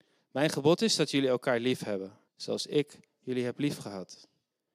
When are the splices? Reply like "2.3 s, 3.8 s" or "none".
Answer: 2.3 s